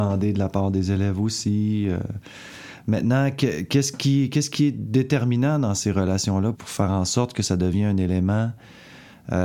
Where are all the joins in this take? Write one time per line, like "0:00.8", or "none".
0:06.5